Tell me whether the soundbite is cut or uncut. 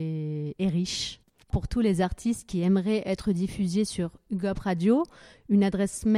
uncut